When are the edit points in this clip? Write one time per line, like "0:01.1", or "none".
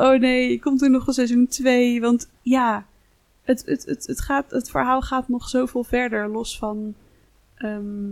0:02.4